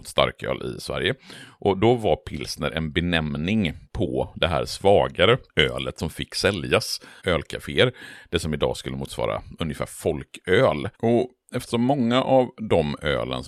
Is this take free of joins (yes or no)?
no